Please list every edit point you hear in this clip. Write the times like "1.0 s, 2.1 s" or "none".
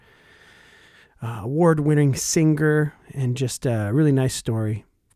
3.0 s